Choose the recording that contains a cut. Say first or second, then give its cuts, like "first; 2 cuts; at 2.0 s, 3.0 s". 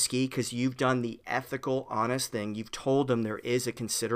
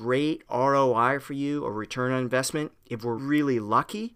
second; 1 cut; at 3.2 s